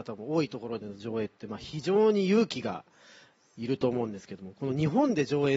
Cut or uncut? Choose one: uncut